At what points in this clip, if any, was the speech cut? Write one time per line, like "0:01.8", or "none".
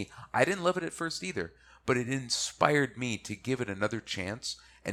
none